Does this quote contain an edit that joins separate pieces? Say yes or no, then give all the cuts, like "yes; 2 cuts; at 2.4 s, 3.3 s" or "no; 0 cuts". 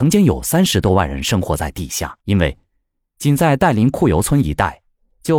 yes; 1 cut; at 2.2 s